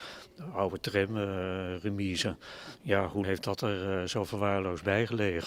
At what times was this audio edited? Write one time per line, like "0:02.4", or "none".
0:03.2